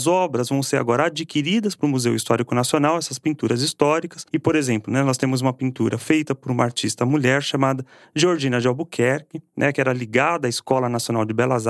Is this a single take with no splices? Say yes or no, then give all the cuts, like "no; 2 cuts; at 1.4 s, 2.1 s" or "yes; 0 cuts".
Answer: yes; 0 cuts